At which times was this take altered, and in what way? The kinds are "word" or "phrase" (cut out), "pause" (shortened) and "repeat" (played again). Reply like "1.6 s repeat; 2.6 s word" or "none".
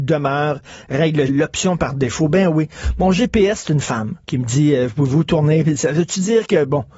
1.3 s word; 4.2 s pause

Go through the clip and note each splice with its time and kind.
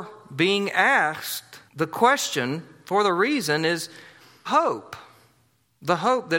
1.7 s pause; 4.5 s word

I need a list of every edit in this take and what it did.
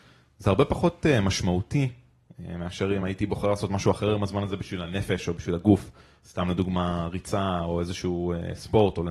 none

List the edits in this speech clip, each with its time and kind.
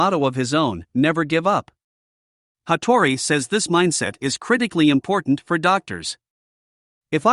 none

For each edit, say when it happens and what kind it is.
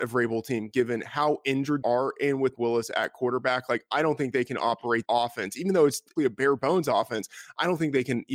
1.8 s word; 2.6 s word; 5.1 s word; 6.2 s word

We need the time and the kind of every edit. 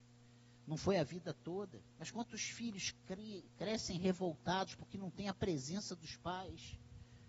1.9 s pause; 3.5 s pause

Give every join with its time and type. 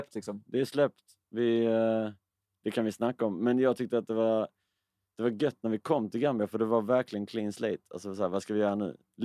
none

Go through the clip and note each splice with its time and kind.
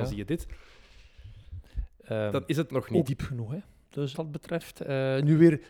2.7 s word; 3.1 s word; 4.1 s word

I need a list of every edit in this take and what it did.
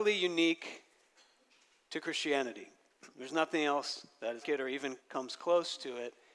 3.1 s pause; 4.4 s word; 5.0 s pause

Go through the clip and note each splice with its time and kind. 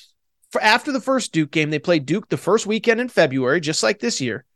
none

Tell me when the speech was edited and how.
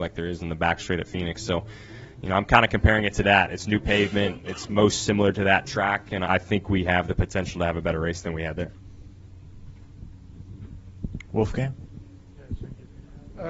6.3 s word

